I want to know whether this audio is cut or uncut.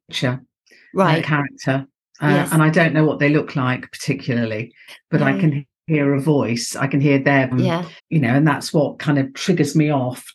cut